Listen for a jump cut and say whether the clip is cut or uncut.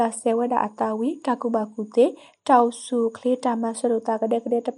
uncut